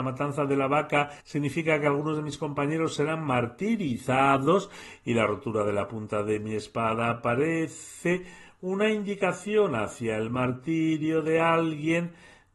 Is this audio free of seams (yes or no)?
no